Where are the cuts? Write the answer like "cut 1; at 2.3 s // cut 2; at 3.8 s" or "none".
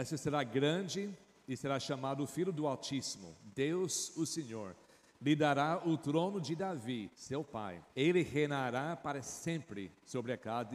cut 1; at 7.1 s // cut 2; at 7.9 s